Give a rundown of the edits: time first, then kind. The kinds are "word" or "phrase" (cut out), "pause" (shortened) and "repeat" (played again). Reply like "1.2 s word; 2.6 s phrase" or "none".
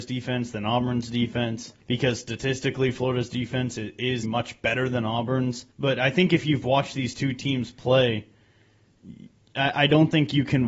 1.8 s pause; 4.2 s word; 5.7 s pause